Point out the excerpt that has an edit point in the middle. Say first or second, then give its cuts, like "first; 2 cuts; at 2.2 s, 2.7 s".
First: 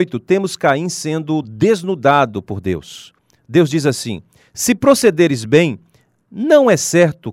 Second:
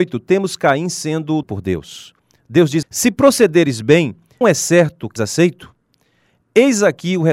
second; 4 cuts; at 1.4 s, 2.8 s, 4.4 s, 5.2 s